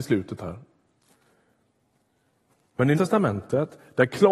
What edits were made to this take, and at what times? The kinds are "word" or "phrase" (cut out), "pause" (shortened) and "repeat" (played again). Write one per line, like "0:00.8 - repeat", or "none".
0:02.9 - word